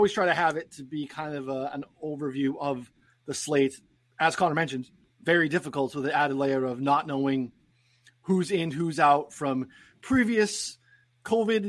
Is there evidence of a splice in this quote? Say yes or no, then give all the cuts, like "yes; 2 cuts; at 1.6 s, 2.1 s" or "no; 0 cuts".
no; 0 cuts